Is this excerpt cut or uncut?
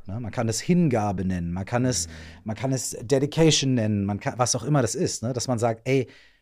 uncut